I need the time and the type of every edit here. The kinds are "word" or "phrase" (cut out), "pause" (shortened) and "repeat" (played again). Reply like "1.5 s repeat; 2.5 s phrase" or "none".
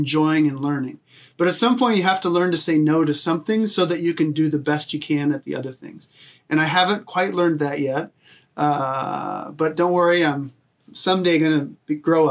none